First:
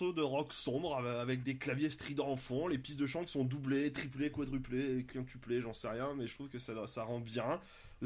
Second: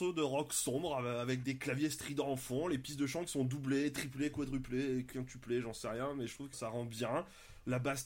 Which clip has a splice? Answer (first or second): second